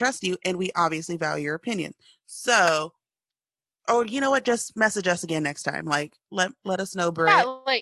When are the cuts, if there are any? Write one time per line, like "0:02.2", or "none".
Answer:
none